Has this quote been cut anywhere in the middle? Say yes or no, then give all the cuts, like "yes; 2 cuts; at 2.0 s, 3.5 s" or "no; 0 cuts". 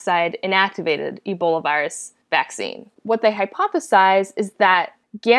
no; 0 cuts